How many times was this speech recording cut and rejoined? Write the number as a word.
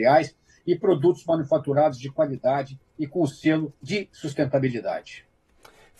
one